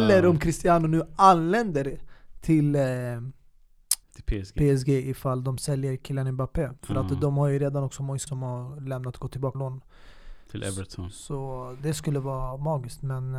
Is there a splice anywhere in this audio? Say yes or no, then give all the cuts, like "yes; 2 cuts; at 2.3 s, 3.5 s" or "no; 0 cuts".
yes; 5 cuts; at 4.0 s, 6.8 s, 8.3 s, 9.5 s, 11.8 s